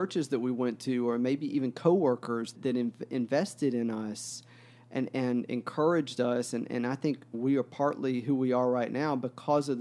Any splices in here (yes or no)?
yes